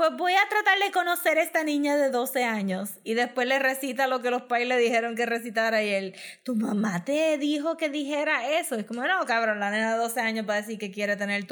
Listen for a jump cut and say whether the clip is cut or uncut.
uncut